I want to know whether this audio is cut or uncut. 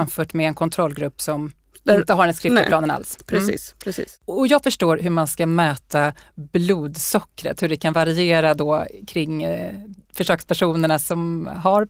uncut